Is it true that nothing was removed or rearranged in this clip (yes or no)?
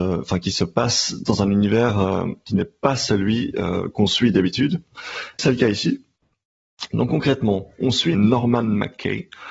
no